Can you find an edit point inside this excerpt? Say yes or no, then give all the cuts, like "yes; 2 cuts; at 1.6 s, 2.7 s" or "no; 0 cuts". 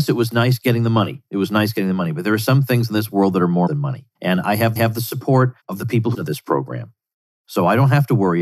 yes; 6 cuts; at 1.3 s, 3.7 s, 4.1 s, 4.8 s, 5.6 s, 6.1 s